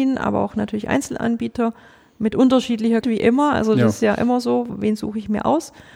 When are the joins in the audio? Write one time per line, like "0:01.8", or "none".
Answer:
0:03.0